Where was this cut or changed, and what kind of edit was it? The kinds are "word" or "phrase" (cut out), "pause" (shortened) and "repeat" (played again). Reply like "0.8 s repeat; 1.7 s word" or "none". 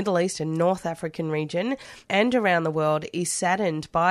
2.0 s pause

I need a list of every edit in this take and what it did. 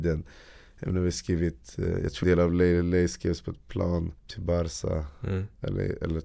2.2 s word; 4.2 s pause

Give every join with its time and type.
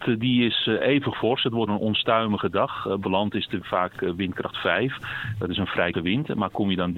1.1 s word; 1.7 s word; 3.0 s word; 3.6 s word; 5.9 s word

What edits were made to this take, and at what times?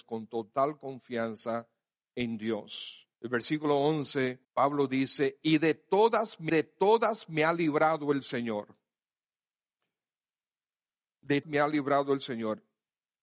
3.1 s pause; 4.4 s pause; 6.5 s repeat; 11.4 s word

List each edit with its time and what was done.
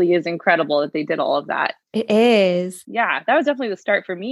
none

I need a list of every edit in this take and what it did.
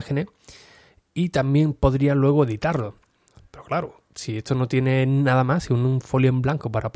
4.0 s pause

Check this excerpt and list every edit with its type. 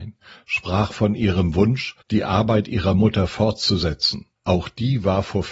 2.0 s pause; 4.4 s pause

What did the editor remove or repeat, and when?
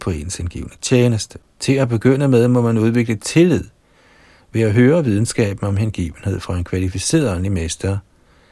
1.5 s pause

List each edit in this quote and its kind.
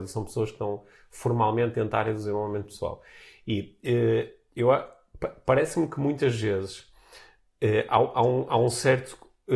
none

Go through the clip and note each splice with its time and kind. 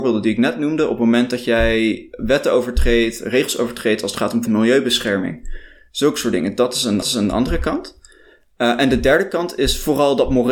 4.4 s word; 7.0 s repeat

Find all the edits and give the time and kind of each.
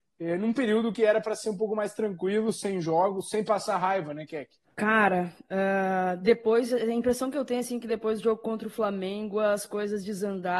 none

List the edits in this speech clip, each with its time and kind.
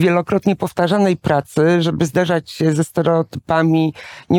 none

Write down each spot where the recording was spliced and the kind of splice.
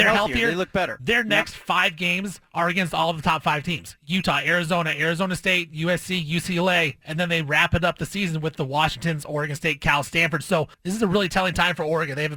10.7 s pause

